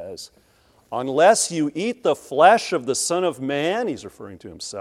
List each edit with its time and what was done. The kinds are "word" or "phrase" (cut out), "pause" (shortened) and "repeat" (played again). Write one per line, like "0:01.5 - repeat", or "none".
none